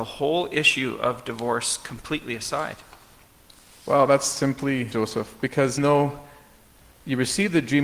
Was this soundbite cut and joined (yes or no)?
yes